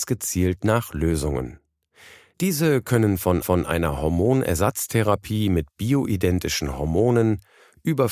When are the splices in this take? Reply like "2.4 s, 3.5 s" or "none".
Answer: 3.4 s